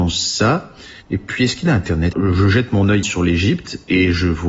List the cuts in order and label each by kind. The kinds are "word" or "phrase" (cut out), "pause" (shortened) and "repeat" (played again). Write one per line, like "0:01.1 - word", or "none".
0:01.0 - pause
0:02.1 - phrase
0:03.0 - word